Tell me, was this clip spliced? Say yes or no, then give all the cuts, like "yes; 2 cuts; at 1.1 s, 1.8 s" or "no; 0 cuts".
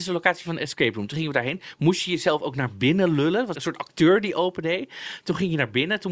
yes; 1 cut; at 3.5 s